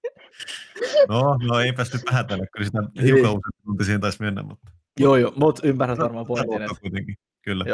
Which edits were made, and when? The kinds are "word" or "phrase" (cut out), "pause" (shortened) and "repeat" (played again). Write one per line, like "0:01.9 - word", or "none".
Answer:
none